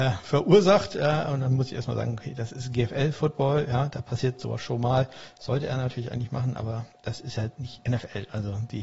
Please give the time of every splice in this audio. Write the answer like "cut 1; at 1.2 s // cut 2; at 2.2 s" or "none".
none